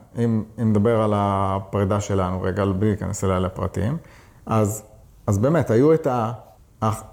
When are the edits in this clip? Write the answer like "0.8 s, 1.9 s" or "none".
none